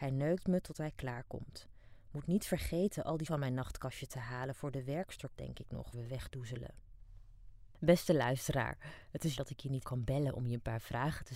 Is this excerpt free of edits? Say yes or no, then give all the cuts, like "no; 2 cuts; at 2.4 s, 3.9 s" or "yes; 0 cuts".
no; 5 cuts; at 3.3 s, 5.4 s, 5.9 s, 9.4 s, 9.8 s